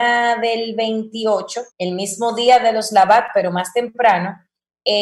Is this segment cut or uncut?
cut